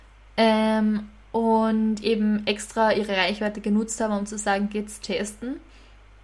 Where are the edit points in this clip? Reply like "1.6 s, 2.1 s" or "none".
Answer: none